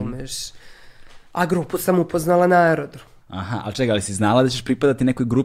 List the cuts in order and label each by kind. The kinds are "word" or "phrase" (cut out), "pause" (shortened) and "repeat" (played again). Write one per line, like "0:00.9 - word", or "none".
0:03.2 - pause